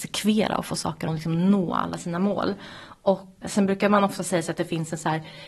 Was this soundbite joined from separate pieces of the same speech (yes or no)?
yes